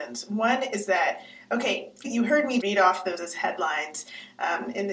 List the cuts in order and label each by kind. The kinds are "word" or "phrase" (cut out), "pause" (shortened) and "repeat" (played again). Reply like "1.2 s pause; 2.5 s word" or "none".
2.0 s word; 2.6 s word; 3.2 s word